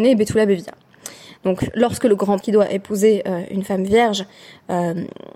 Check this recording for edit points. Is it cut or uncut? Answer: cut